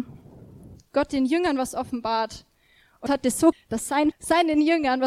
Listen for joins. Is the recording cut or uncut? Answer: cut